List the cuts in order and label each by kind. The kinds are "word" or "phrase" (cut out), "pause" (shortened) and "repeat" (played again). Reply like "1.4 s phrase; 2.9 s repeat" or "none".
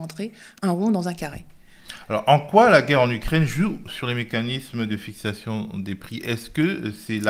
none

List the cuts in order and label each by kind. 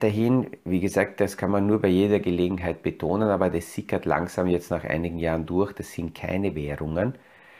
none

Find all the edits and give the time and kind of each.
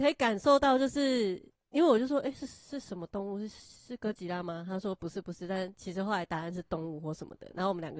none

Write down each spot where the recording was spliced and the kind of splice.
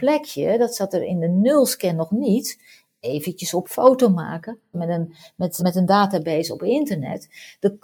3.6 s word; 4.7 s word; 5.6 s word

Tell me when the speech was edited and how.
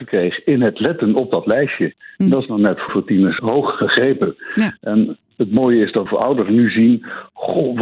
2.9 s word; 3.4 s word; 6.1 s phrase

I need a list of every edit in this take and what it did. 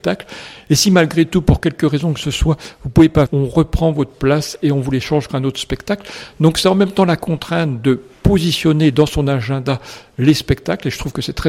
3.3 s word; 5.3 s word

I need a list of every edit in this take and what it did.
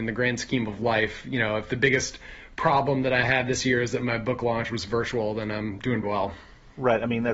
6.0 s word

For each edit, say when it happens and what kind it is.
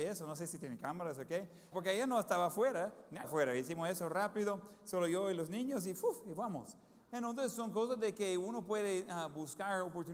1.7 s word; 3.2 s word

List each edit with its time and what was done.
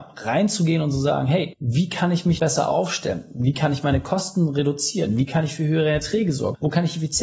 2.4 s word

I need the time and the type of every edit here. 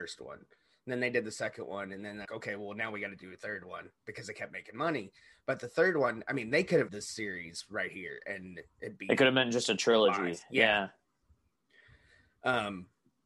2.2 s word; 6.9 s word

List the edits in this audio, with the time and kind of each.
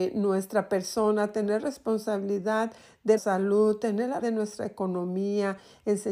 1.6 s word; 3.2 s word; 4.2 s word

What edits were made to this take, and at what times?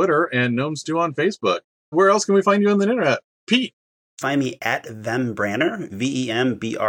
1.9 s word; 4.2 s phrase

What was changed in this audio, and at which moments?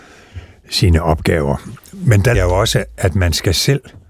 2.3 s word

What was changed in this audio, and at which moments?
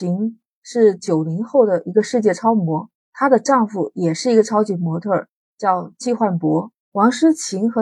2.9 s pause; 6.8 s pause

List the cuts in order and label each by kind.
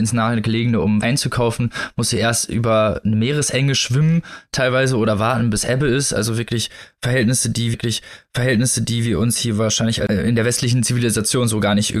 1.0 s word; 3.0 s word; 7.7 s repeat

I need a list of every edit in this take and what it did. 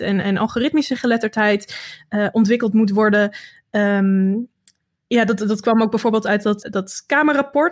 6.6 s word

